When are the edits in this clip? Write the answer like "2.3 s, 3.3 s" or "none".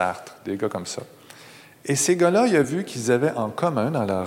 none